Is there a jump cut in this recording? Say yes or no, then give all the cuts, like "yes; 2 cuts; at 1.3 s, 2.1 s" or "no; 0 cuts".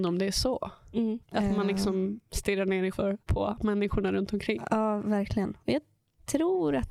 yes; 3 cuts; at 1.2 s, 2.9 s, 3.2 s